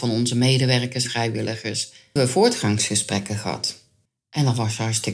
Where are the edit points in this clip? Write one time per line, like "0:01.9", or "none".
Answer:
0:01.0
0:02.2
0:04.1